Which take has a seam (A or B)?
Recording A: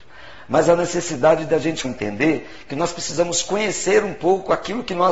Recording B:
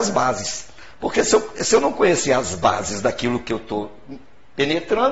A